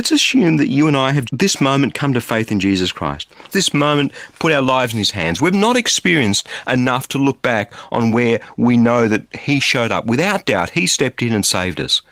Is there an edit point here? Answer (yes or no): yes